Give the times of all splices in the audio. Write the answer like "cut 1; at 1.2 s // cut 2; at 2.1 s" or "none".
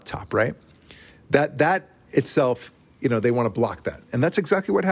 none